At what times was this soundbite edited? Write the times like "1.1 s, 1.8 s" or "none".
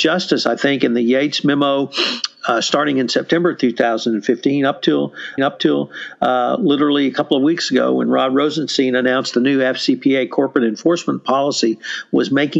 5.4 s